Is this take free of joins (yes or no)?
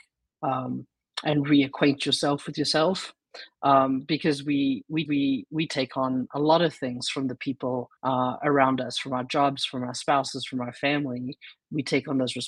no